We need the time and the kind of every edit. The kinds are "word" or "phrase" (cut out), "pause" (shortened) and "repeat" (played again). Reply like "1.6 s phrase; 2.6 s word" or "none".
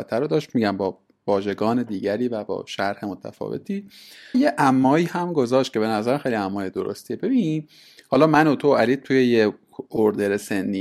4.3 s word